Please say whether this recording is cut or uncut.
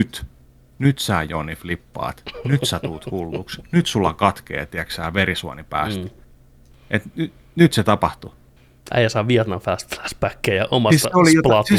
uncut